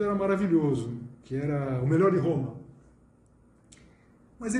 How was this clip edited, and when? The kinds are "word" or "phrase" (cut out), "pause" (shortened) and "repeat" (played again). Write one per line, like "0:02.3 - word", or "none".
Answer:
0:01.2 - pause